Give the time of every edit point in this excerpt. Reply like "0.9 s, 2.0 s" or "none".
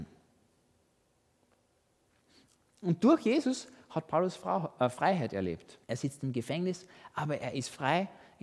5.8 s